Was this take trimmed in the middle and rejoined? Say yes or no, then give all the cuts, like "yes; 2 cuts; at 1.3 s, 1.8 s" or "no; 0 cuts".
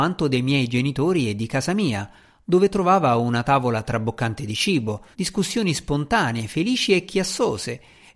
yes; 1 cut; at 5.1 s